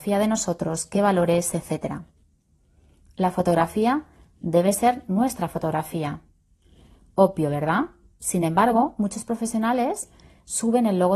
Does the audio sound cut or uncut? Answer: uncut